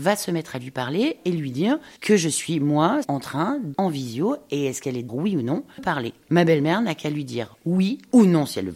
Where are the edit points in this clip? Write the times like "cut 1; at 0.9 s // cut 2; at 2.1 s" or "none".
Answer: cut 1; at 2.0 s // cut 2; at 3.0 s // cut 3; at 3.7 s // cut 4; at 5.1 s // cut 5; at 5.8 s